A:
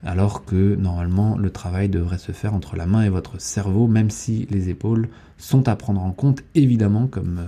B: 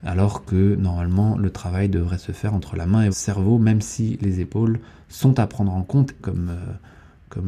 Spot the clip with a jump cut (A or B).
B